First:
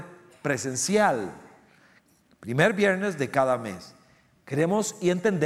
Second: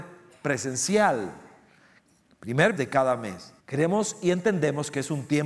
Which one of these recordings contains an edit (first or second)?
second